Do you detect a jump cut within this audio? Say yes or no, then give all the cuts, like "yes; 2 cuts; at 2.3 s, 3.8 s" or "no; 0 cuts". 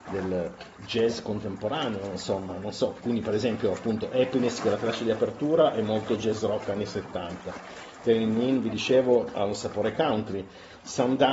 no; 0 cuts